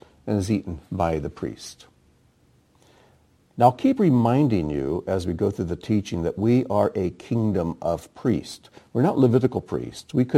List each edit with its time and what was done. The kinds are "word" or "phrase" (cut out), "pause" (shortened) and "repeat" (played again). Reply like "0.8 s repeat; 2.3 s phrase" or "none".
none